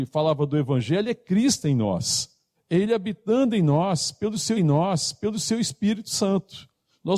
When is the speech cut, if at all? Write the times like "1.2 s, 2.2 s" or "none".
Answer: 2.5 s, 4.6 s